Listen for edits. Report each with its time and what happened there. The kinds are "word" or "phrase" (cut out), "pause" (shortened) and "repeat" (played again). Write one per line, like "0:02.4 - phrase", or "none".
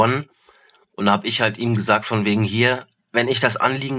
none